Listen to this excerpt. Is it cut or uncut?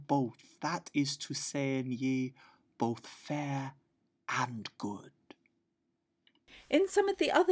uncut